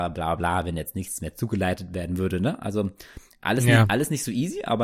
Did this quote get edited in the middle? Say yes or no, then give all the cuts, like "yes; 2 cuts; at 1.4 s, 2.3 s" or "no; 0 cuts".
no; 0 cuts